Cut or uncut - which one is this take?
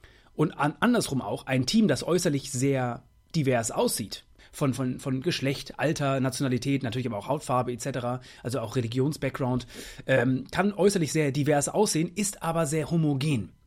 uncut